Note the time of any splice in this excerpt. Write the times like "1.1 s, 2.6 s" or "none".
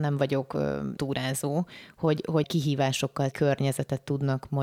1.0 s, 2.4 s, 3.3 s